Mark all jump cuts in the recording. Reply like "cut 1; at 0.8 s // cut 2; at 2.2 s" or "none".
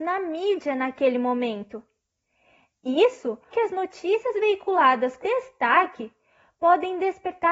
cut 1; at 3.5 s // cut 2; at 5.2 s